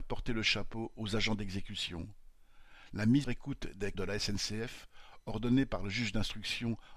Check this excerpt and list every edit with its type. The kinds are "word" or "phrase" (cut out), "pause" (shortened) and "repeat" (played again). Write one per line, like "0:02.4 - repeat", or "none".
0:03.2 - word
0:03.9 - word